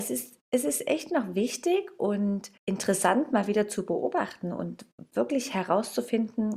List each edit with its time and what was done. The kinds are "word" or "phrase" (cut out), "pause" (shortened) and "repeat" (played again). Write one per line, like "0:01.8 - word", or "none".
0:02.6 - pause